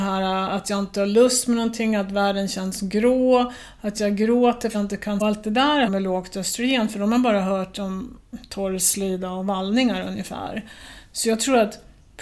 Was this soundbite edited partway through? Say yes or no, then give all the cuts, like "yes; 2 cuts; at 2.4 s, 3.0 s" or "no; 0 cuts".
yes; 3 cuts; at 4.7 s, 5.2 s, 5.9 s